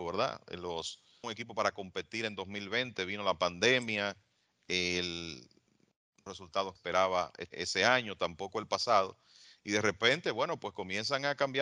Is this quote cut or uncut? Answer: cut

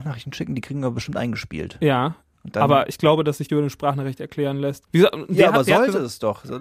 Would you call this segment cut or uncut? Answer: cut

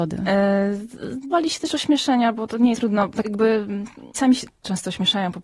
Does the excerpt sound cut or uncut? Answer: cut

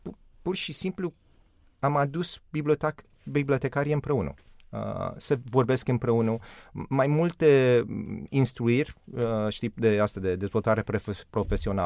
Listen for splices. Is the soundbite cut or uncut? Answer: uncut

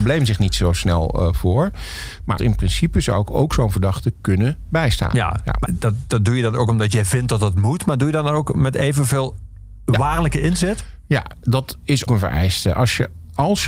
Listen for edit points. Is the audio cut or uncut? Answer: cut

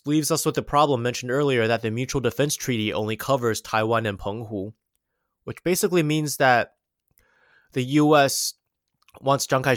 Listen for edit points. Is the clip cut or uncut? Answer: uncut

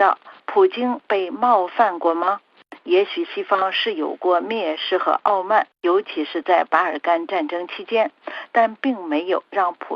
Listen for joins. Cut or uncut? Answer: cut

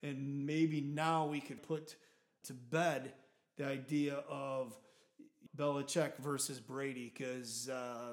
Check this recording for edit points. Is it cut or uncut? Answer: cut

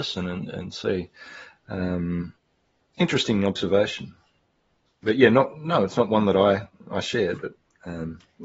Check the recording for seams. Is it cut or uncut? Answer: uncut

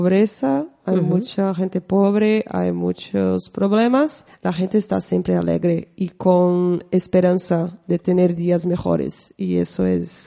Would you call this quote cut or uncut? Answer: cut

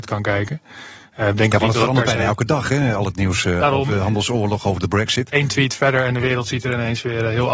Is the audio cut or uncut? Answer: uncut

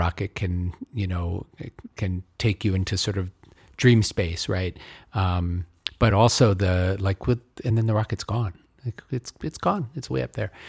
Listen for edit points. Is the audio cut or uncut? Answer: uncut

